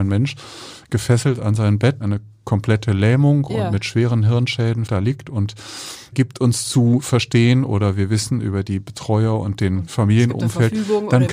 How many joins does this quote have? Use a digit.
4